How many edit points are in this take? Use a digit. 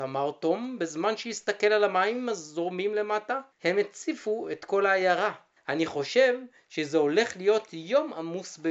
2